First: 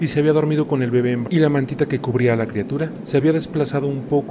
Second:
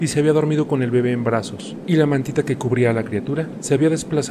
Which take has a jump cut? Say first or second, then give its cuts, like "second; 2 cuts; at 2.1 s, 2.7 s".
first; 1 cut; at 1.2 s